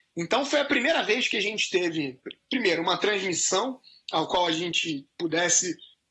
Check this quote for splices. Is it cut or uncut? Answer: uncut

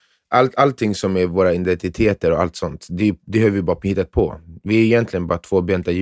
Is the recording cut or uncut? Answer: uncut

